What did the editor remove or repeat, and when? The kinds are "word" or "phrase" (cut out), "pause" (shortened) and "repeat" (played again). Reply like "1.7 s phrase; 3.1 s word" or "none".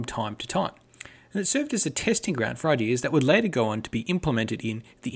none